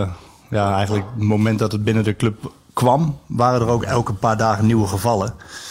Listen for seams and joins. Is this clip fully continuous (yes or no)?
yes